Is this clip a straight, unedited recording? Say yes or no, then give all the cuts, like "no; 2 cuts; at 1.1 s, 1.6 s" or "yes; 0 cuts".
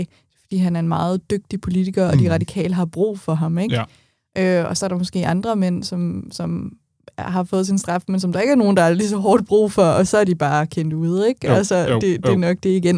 yes; 0 cuts